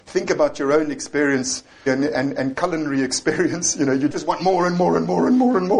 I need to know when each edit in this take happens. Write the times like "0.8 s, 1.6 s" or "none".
1.9 s, 4.1 s